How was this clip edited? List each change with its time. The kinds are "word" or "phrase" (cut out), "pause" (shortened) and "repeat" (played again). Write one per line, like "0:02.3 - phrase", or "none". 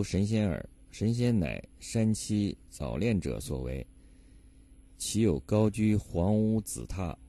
0:02.7 - pause